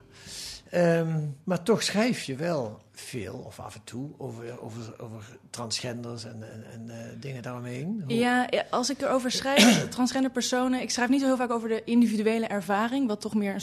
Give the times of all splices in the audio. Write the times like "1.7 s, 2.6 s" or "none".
2.9 s

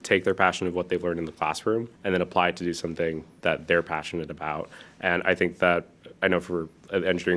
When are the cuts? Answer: 1.9 s

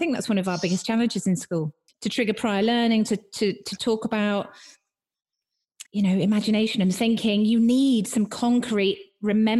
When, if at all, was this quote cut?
1.9 s, 5.9 s

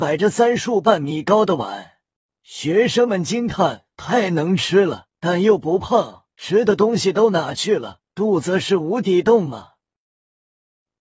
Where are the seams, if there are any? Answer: 2.1 s, 3.9 s, 5.2 s, 6.3 s, 8.1 s

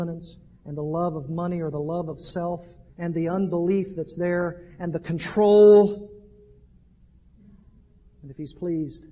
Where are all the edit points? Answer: 2.9 s

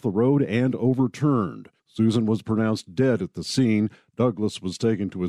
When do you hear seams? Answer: 1.8 s

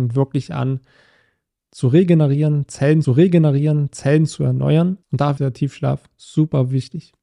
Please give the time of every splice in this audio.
3.0 s, 5.0 s, 5.4 s

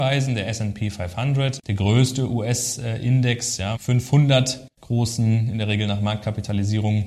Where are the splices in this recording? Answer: 1.6 s, 3.8 s, 4.7 s

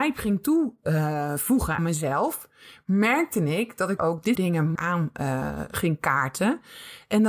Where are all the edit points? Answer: 1.8 s, 4.0 s, 4.4 s, 4.8 s

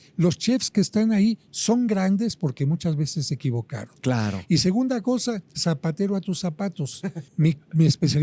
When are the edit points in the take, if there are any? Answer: 5.5 s, 7.3 s

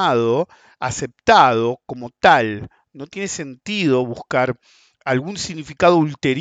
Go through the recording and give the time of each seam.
none

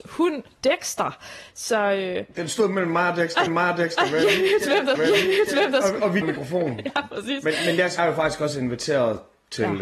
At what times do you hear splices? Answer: 3.5 s, 5.0 s, 6.2 s, 8.0 s

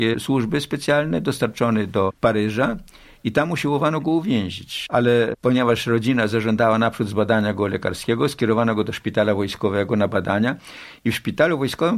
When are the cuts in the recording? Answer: none

